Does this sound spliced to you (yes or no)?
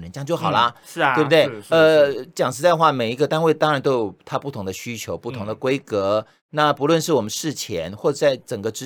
no